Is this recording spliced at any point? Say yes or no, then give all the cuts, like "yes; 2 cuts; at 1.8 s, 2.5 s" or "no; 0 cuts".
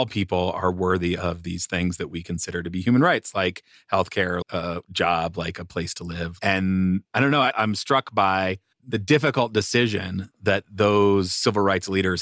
yes; 2 cuts; at 4.4 s, 7.1 s